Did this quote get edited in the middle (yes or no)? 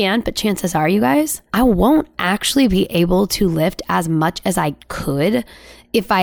yes